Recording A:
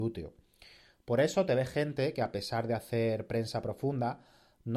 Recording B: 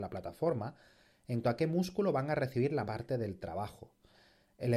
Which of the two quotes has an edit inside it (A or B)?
B